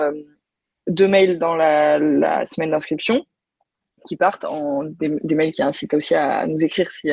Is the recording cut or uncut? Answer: uncut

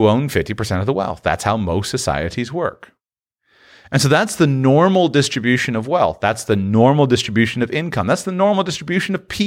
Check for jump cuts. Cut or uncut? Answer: uncut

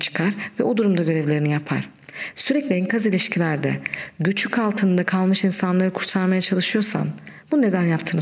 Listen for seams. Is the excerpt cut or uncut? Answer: uncut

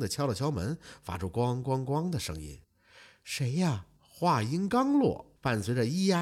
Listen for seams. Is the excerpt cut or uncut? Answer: cut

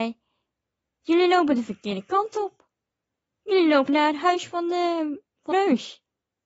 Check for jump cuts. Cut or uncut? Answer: cut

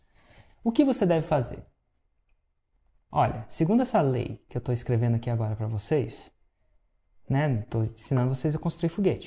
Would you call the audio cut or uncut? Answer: uncut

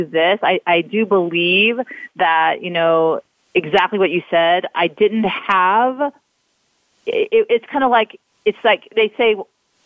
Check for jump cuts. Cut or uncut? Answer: uncut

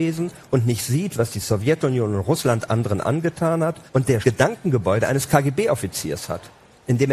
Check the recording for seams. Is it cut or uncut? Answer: cut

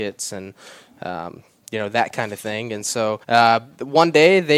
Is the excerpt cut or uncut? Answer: cut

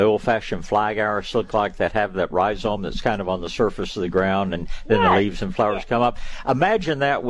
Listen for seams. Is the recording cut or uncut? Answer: uncut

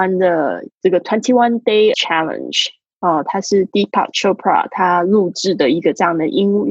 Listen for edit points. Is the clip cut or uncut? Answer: cut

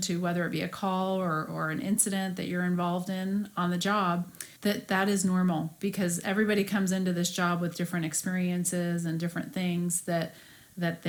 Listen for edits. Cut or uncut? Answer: cut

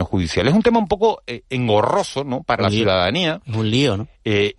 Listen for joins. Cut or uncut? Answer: cut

